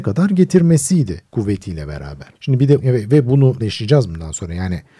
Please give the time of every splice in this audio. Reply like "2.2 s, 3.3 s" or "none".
1.3 s, 2.4 s, 2.8 s, 3.6 s